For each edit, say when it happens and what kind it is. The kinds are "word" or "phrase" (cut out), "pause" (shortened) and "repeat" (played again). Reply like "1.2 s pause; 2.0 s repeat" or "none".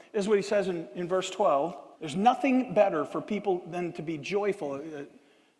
1.9 s pause